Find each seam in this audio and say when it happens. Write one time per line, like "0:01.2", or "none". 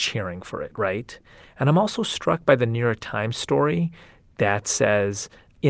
none